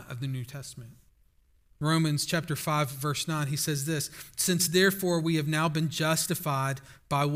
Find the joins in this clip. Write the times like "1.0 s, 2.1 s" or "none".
1.1 s